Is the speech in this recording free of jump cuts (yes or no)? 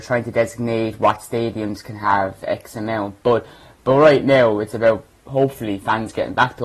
yes